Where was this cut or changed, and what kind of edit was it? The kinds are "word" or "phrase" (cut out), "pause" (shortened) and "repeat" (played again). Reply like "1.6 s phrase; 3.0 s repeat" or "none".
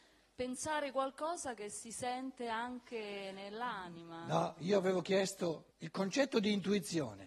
5.7 s pause